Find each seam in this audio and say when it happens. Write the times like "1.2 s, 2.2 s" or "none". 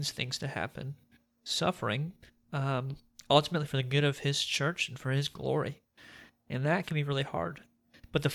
none